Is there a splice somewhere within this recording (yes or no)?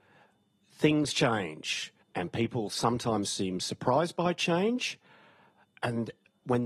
yes